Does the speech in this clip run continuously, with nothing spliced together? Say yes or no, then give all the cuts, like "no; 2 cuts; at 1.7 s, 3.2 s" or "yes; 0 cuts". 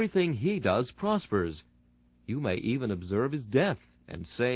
yes; 0 cuts